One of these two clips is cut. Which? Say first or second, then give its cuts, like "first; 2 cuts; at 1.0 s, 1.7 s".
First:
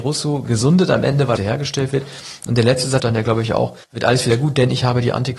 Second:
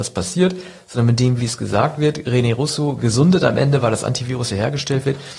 first; 3 cuts; at 1.4 s, 3.0 s, 3.8 s